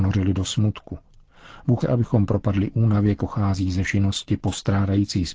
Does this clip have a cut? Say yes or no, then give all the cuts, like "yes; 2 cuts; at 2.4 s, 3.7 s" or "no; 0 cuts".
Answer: yes; 3 cuts; at 1.8 s, 3.2 s, 3.8 s